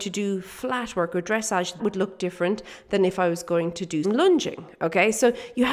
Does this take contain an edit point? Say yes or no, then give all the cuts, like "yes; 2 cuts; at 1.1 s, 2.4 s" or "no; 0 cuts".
yes; 2 cuts; at 1.8 s, 4.0 s